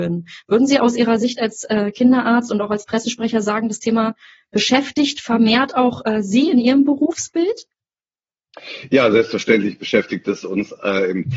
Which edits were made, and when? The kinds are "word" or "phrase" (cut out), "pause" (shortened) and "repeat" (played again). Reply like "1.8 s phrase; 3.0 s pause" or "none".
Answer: none